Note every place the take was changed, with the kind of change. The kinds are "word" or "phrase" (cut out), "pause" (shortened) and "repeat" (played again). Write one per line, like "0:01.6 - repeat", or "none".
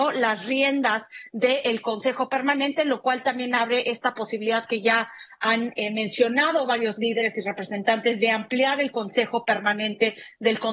none